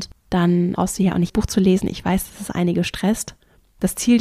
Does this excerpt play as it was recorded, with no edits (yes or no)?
no